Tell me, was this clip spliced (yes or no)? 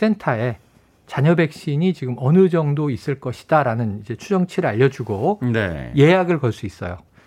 no